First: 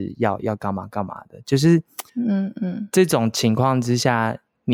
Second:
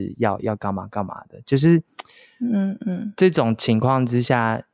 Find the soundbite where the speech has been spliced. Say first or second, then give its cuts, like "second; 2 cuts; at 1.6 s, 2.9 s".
first; 1 cut; at 2.1 s